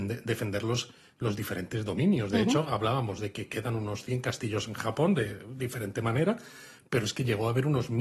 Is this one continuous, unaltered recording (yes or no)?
yes